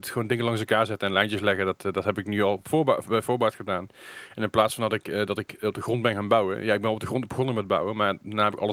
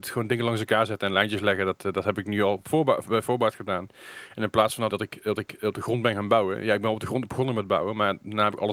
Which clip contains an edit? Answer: second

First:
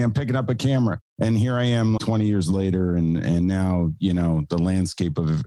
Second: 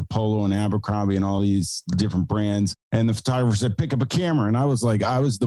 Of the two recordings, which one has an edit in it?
first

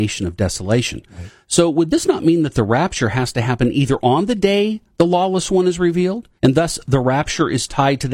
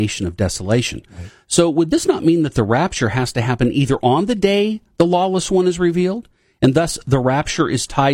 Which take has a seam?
first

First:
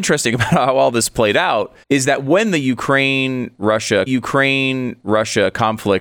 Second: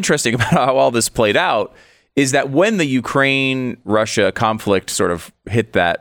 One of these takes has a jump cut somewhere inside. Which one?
first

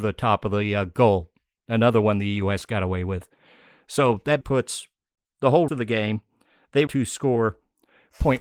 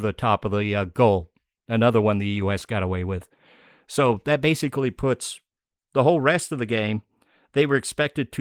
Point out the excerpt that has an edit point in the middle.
first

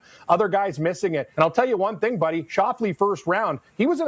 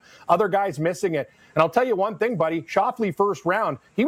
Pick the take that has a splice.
first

